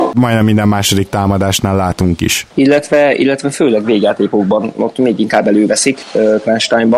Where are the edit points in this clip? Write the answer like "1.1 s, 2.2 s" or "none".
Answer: none